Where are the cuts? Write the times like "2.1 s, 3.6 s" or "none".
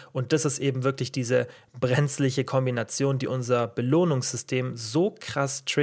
none